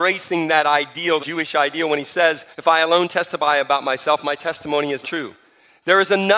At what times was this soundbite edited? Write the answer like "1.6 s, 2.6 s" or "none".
1.2 s, 2.5 s, 5.0 s